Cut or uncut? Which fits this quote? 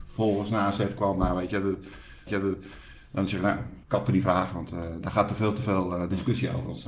cut